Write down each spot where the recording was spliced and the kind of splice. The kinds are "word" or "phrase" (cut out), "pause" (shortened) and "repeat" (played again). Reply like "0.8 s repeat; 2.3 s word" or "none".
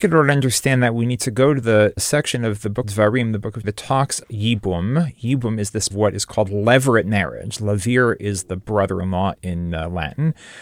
2.8 s word; 3.6 s word; 4.2 s word; 5.9 s phrase